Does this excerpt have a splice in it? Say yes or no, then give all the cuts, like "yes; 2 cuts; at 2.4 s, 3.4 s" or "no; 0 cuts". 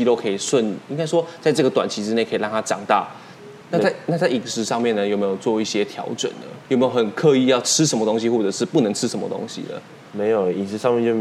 yes; 3 cuts; at 3.6 s, 6.6 s, 10.0 s